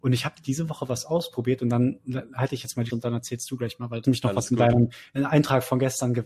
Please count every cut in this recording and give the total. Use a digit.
3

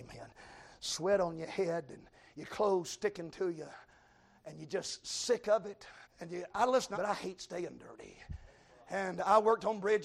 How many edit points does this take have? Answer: 3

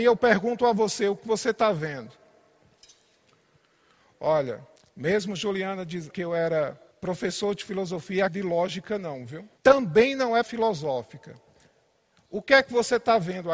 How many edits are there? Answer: 7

